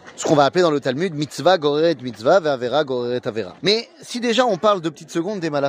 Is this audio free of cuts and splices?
no; 1 cut; at 3.6 s

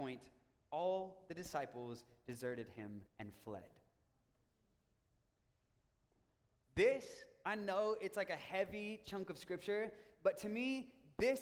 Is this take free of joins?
no; 1 cut; at 3.1 s

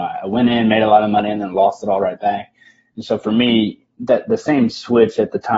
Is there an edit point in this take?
no; 0 cuts

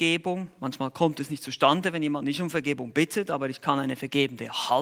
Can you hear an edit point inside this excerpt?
no; 0 cuts

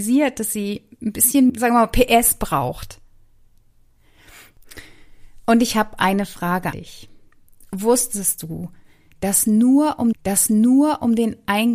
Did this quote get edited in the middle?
yes; 3 cuts; at 1.5 s, 6.7 s, 10.1 s

